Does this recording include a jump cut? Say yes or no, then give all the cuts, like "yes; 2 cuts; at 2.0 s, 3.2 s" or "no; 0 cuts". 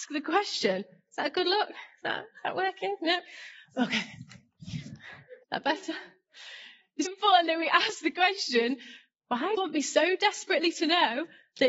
yes; 3 cuts; at 5.4 s, 7.1 s, 9.6 s